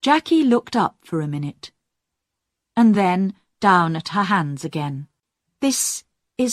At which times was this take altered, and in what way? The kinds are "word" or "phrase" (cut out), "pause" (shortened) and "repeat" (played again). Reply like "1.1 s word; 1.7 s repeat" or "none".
none